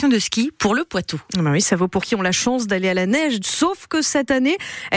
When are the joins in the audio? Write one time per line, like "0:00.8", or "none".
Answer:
0:02.0
0:03.4